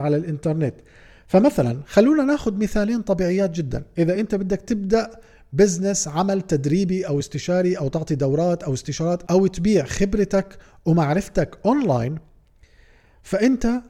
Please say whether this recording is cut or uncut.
uncut